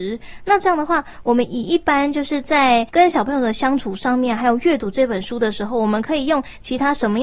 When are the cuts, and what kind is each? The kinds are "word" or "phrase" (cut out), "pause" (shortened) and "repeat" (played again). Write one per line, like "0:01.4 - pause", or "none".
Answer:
0:02.9 - pause